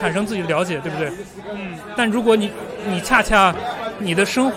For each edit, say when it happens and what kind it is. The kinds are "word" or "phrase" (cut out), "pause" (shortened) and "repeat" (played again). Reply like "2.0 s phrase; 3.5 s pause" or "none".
none